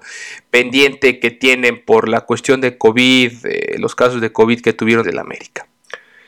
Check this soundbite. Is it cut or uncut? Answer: cut